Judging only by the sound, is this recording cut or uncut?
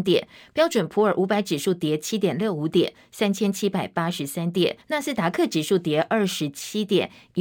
cut